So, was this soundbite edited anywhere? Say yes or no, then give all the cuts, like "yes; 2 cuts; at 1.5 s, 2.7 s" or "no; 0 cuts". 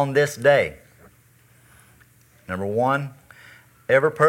no; 0 cuts